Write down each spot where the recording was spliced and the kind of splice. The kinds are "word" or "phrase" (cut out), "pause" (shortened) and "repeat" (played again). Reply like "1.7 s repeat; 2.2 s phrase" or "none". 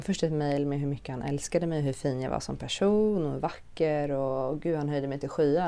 none